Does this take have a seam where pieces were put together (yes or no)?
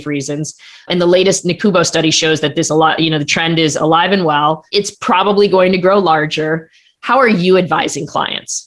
no